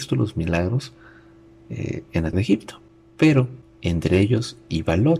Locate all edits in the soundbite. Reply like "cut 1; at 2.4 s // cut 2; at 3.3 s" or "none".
cut 1; at 2.3 s